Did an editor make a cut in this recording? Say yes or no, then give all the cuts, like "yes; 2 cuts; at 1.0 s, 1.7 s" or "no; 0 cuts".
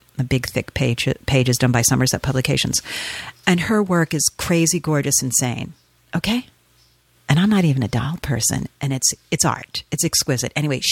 no; 0 cuts